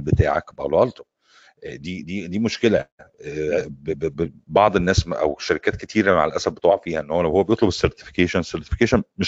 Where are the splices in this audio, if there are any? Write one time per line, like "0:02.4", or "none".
none